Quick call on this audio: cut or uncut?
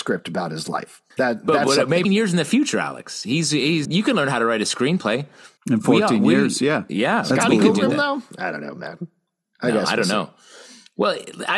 cut